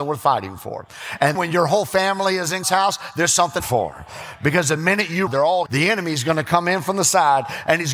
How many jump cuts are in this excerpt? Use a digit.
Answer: 5